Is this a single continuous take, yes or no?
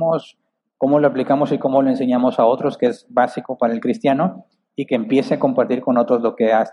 yes